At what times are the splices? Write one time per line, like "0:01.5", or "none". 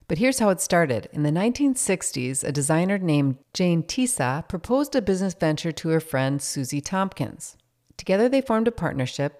none

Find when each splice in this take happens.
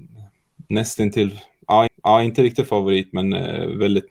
0:01.9

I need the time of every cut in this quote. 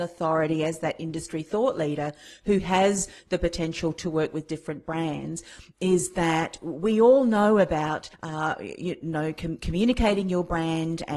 0:08.1

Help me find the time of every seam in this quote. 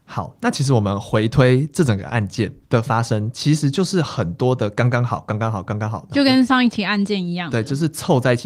0:02.6

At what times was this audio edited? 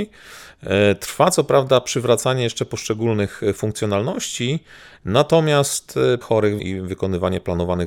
0:06.2
0:06.6

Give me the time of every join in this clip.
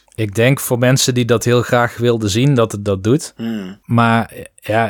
none

